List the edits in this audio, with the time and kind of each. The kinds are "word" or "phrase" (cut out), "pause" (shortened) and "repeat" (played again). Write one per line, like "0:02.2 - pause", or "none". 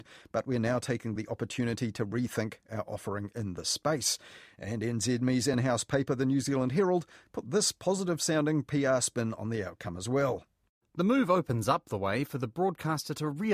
none